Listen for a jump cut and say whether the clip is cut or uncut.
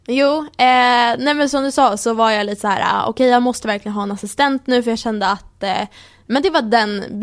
uncut